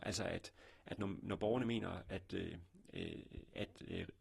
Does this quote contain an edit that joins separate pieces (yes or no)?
no